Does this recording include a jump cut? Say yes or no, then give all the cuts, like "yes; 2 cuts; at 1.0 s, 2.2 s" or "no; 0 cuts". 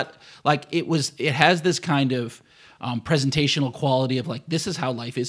no; 0 cuts